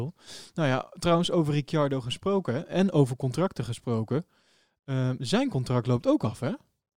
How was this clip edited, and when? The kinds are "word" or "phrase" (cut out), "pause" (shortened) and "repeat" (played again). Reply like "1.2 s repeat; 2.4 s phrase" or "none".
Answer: none

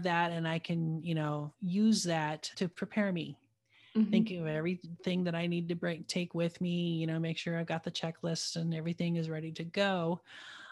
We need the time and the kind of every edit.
2.5 s word

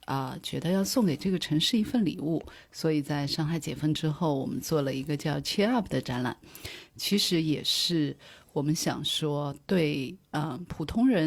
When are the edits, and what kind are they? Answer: none

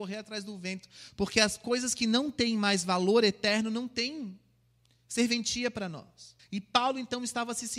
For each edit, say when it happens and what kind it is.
6.4 s pause

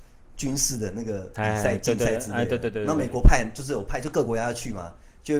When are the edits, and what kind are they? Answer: none

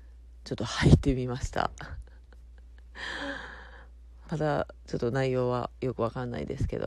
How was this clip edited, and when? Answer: 4.2 s phrase

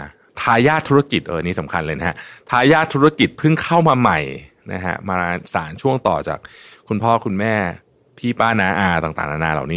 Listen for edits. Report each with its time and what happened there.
none

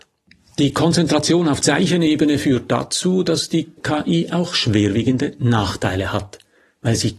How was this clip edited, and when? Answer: 1.6 s word; 3.8 s word

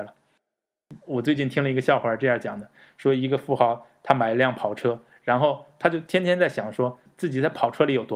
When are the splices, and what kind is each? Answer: none

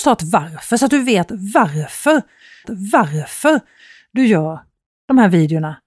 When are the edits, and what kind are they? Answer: 2.6 s repeat

